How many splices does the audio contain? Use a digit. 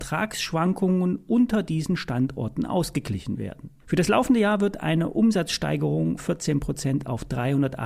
2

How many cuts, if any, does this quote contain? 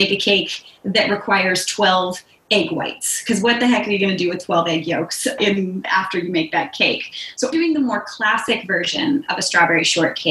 3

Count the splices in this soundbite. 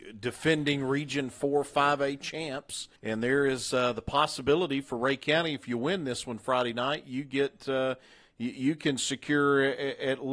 1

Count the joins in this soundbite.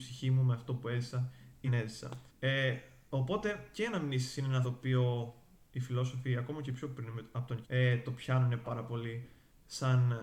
5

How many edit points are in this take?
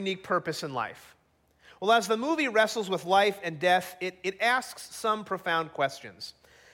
0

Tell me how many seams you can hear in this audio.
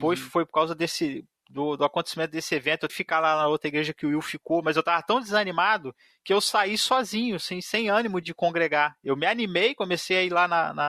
3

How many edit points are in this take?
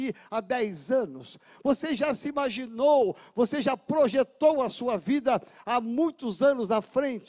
0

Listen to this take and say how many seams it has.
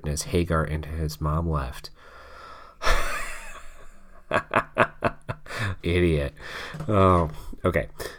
1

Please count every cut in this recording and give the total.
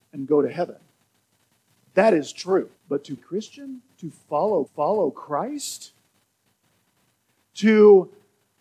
3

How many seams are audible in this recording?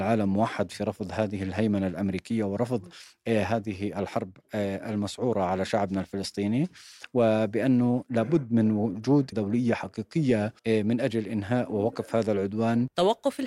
2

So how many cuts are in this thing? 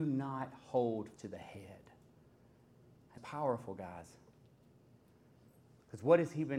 2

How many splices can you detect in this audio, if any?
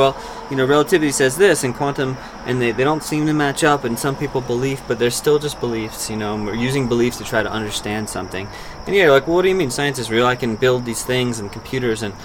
0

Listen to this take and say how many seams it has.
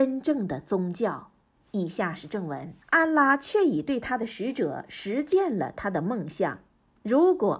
1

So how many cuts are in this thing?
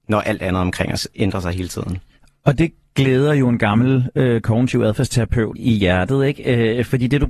1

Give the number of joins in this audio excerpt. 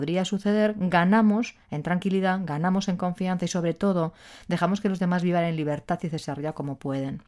0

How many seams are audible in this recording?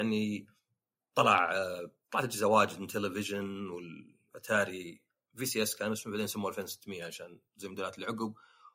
0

